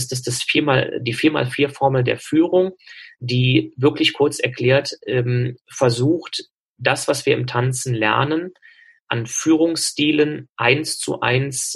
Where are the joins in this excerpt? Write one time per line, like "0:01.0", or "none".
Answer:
none